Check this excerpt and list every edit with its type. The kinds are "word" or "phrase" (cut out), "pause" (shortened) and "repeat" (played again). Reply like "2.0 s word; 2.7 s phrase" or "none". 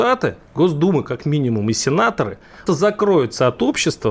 2.7 s word

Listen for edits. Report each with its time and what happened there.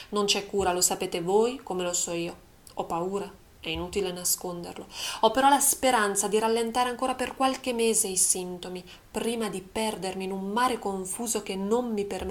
none

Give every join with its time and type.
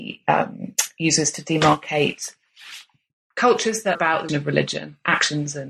3.9 s word; 4.3 s word

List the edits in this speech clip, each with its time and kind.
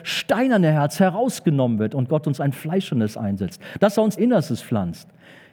4.2 s phrase

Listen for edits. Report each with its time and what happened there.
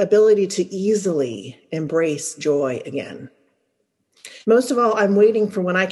4.4 s pause

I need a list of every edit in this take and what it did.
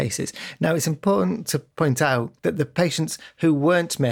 1.7 s pause; 2.4 s pause

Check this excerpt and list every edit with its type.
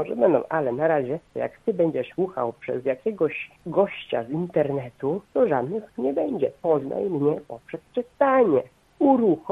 1.3 s pause; 2.1 s word; 3.6 s pause; 5.2 s pause; 6.0 s word

